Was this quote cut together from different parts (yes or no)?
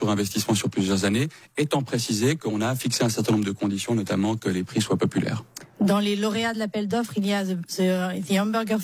no